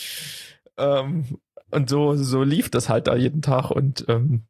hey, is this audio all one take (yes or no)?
no